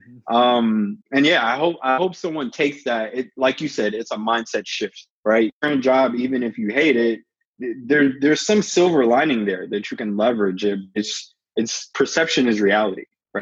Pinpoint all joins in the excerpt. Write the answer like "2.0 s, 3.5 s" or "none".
1.0 s, 5.2 s